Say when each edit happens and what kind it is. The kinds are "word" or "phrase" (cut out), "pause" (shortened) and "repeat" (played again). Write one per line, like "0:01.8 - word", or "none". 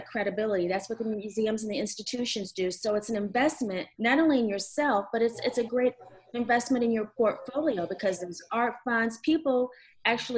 0:03.9 - pause